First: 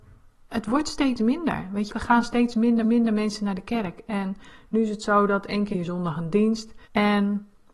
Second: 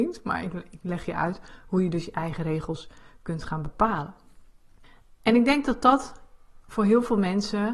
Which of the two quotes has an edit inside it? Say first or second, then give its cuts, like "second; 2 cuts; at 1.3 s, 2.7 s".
first; 4 cuts; at 1.9 s, 2.8 s, 5.7 s, 6.8 s